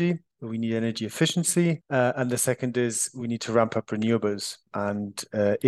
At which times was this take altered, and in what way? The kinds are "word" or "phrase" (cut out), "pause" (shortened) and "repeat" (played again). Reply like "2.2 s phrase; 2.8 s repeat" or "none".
none